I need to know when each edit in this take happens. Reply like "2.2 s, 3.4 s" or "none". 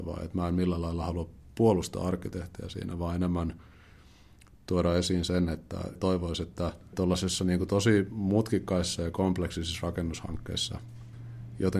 none